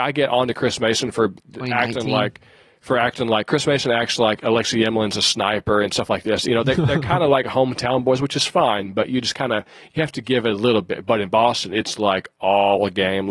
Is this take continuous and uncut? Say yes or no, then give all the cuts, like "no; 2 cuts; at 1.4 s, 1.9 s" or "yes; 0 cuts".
yes; 0 cuts